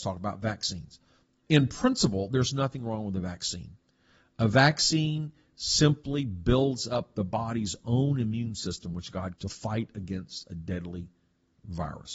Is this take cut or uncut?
cut